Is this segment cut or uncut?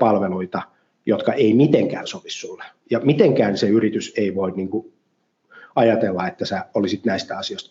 uncut